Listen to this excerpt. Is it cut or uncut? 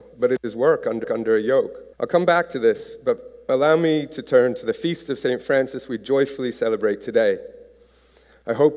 cut